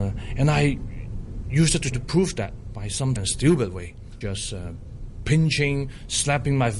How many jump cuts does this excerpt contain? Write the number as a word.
three